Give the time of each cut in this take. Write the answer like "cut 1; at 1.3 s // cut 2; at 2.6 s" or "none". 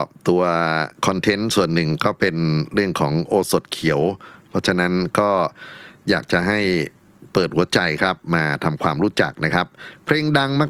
cut 1; at 1.0 s